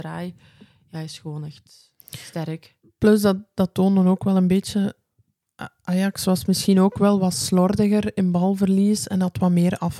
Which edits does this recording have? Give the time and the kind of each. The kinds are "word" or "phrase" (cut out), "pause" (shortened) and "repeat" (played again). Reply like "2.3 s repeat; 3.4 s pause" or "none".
2.0 s pause